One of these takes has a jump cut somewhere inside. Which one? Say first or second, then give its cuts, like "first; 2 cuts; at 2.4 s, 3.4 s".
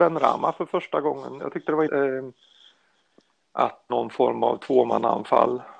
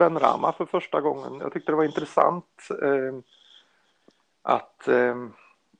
first; 2 cuts; at 1.9 s, 3.9 s